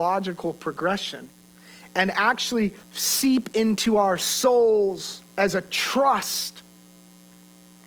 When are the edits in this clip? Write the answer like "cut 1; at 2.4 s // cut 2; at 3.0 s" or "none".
cut 1; at 2.8 s // cut 2; at 5.3 s